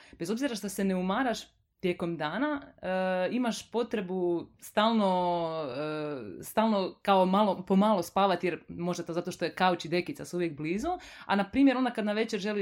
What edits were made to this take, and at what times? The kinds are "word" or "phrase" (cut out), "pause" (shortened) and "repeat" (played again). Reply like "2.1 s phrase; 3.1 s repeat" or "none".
none